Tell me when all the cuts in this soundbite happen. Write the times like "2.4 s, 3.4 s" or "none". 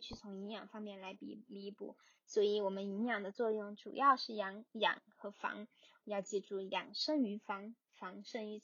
none